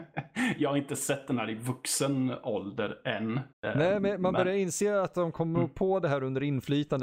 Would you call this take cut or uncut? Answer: cut